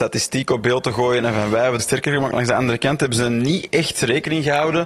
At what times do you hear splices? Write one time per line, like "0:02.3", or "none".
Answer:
0:01.8